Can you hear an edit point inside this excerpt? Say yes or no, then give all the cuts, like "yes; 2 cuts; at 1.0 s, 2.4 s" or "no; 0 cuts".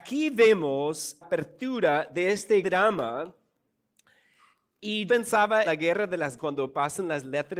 yes; 5 cuts; at 1.2 s, 2.6 s, 5.1 s, 5.6 s, 6.4 s